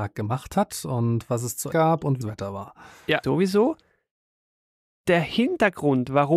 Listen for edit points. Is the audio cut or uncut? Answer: cut